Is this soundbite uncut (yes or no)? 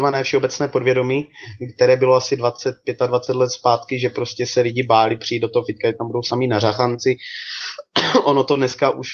yes